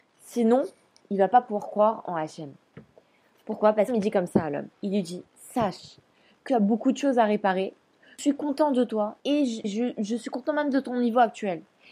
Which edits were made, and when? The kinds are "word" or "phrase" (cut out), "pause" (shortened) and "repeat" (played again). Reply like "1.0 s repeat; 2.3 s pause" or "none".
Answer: 3.9 s word; 4.7 s pause; 5.3 s pause; 6.5 s phrase; 9.2 s pause; 9.6 s word